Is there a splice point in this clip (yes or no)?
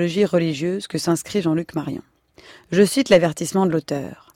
no